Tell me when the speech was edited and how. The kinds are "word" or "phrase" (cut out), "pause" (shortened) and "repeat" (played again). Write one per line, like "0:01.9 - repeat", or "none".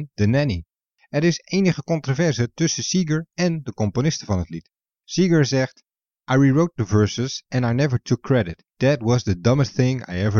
none